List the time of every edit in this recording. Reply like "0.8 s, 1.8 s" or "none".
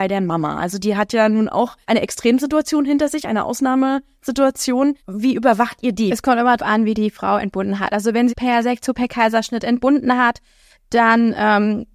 1.8 s, 5.0 s, 6.6 s, 8.3 s

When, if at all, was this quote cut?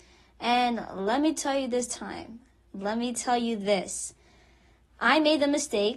none

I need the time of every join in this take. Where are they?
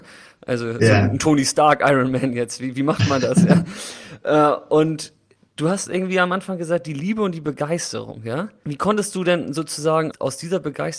none

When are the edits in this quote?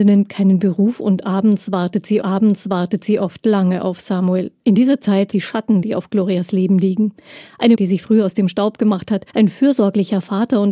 2.2 s, 4.6 s, 5.3 s, 5.8 s, 7.7 s, 9.3 s

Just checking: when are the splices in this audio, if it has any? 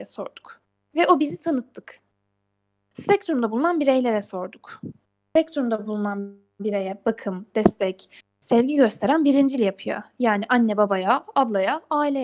none

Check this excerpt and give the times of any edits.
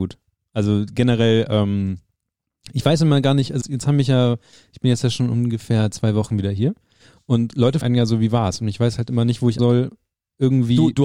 3.6 s, 7.8 s, 9.6 s

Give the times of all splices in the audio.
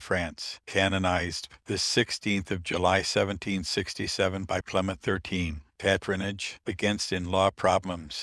4.6 s

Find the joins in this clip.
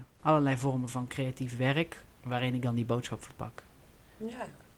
2.1 s

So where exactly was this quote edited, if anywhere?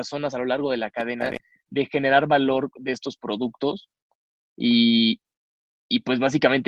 none

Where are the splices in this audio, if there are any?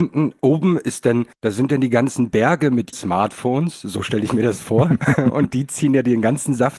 1.3 s, 2.9 s

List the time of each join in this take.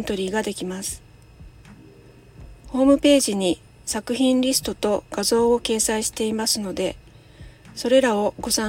none

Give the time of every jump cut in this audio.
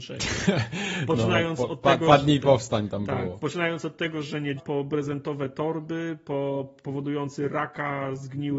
4.6 s

